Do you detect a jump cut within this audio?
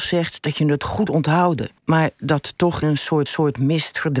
yes; 4 cuts; at 1.1 s, 1.8 s, 2.8 s, 3.3 s

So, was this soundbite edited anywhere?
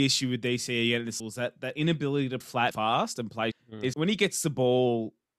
yes; 5 cuts; at 1.2 s, 2.4 s, 2.7 s, 3.5 s, 3.9 s

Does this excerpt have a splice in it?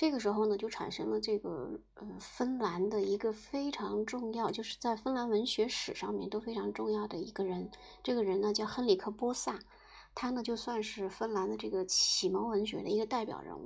no; 0 cuts

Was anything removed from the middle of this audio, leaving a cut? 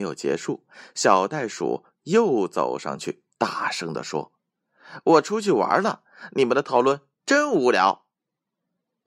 no; 0 cuts

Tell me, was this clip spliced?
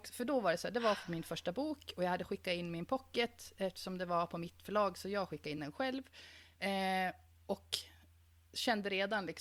no; 0 cuts

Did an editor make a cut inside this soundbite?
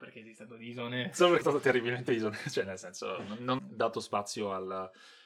yes; 2 cuts; at 1.4 s, 3.6 s

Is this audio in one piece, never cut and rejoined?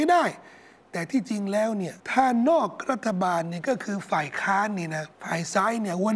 no; 2 cuts; at 2.0 s, 5.1 s

